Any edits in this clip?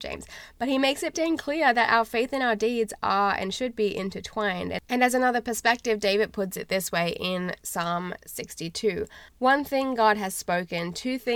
yes; 2 cuts; at 1.1 s, 9.3 s

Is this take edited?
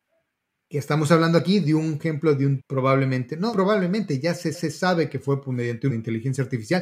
yes; 5 cuts; at 2.0 s, 2.6 s, 3.5 s, 4.5 s, 5.9 s

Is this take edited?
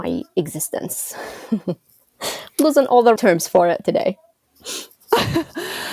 yes; 1 cut; at 3.2 s

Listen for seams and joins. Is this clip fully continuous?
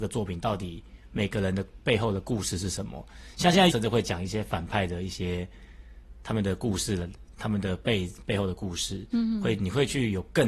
no; 1 cut; at 3.7 s

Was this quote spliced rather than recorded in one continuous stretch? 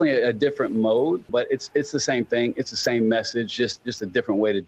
no; 0 cuts

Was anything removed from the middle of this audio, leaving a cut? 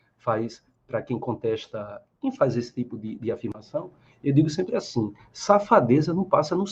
no; 0 cuts

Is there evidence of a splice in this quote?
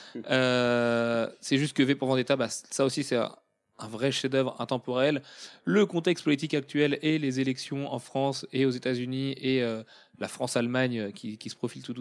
no; 0 cuts

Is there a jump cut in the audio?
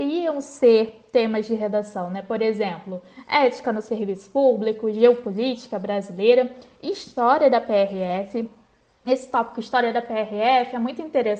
no; 0 cuts

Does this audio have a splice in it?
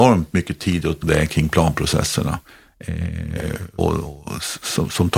yes; 2 cuts; at 1.0 s, 3.8 s

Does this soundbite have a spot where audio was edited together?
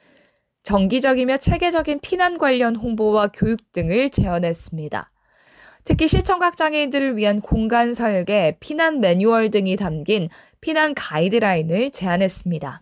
no; 0 cuts

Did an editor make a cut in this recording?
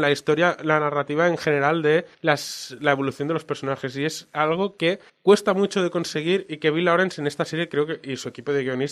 yes; 2 cuts; at 2.1 s, 5.1 s

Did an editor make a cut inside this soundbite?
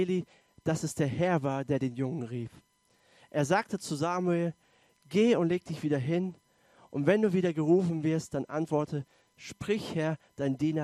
no; 0 cuts

